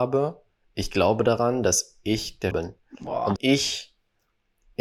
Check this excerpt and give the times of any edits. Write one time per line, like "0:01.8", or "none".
0:02.5
0:03.4